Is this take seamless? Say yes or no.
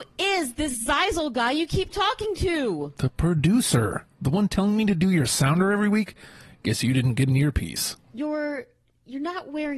yes